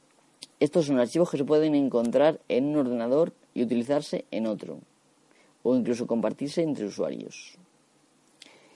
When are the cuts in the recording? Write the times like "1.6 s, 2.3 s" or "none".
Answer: none